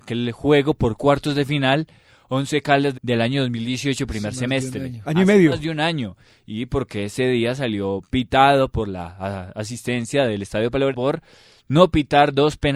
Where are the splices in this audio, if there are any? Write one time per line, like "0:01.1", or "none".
0:02.9
0:05.0
0:10.9